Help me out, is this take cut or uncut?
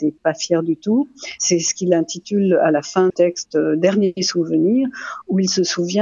cut